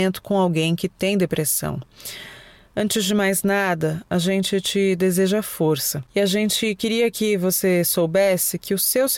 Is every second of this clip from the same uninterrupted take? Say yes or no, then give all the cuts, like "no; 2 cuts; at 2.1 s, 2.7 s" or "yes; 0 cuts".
yes; 0 cuts